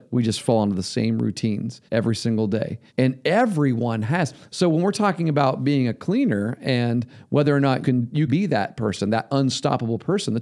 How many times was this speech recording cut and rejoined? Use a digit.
4